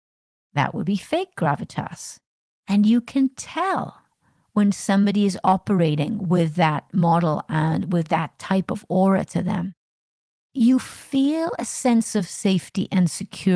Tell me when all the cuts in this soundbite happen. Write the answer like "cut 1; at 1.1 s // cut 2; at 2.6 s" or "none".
none